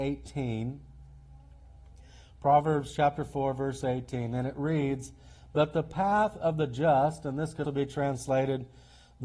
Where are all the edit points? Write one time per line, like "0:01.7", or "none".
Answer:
0:07.6